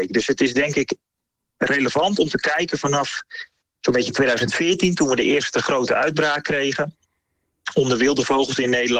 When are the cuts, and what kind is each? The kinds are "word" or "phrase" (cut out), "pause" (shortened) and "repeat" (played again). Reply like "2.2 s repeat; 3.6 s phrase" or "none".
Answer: none